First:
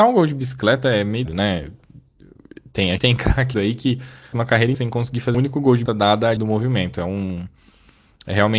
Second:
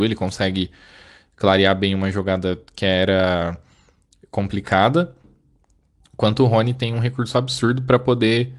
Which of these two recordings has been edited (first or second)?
first